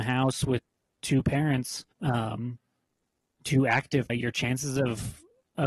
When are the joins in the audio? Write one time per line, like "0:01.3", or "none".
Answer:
0:01.9
0:04.1